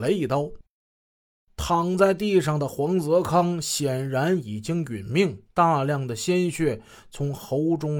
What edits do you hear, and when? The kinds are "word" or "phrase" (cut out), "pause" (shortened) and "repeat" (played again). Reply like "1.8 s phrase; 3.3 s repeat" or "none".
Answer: 5.5 s pause